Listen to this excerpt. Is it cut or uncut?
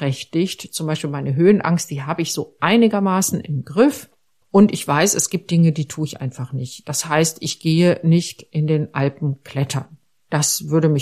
uncut